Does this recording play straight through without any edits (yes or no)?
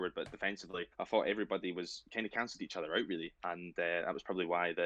no